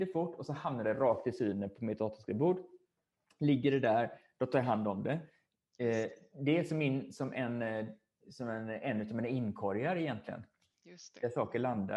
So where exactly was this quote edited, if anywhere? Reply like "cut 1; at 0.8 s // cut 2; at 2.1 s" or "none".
none